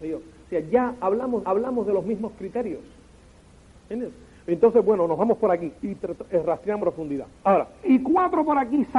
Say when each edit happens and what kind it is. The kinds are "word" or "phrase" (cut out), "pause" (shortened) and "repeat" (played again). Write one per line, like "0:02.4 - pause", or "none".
0:01.4 - repeat
0:05.8 - pause
0:06.8 - word
0:07.8 - phrase